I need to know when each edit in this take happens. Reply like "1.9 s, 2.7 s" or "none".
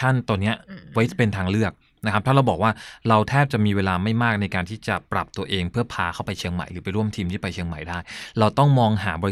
none